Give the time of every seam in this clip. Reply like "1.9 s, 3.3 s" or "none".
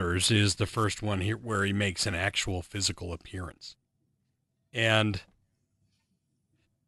none